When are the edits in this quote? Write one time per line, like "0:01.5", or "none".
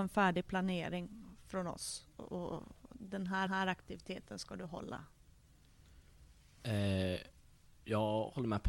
0:03.5